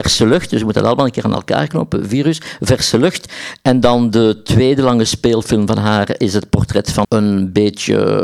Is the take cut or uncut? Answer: cut